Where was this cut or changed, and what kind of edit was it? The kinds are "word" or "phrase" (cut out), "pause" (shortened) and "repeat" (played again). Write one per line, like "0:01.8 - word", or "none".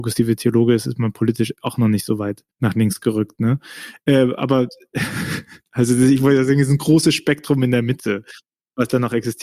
0:02.5 - pause